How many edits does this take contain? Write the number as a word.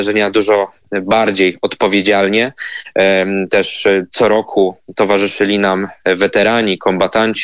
zero